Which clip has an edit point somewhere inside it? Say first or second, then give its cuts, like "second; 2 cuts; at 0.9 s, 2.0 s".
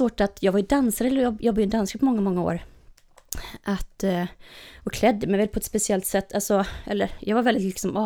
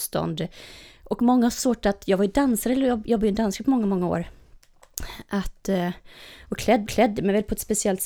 second; 1 cut; at 6.9 s